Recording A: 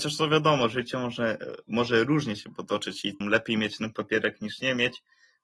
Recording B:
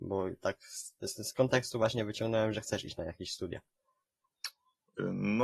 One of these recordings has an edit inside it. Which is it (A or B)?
A